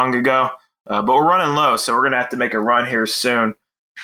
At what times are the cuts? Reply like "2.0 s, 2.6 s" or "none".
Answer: none